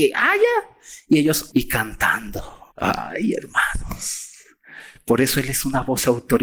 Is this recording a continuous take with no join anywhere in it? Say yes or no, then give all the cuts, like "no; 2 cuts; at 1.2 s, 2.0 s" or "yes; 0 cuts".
no; 2 cuts; at 1.5 s, 2.7 s